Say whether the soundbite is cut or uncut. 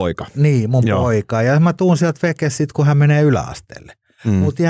uncut